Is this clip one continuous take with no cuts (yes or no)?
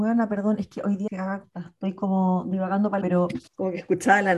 no